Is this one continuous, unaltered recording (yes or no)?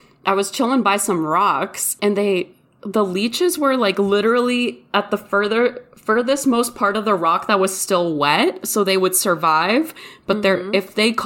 yes